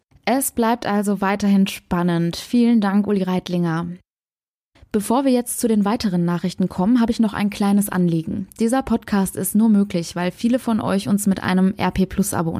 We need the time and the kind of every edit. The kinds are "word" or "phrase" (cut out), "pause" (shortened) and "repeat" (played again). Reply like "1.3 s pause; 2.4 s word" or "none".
none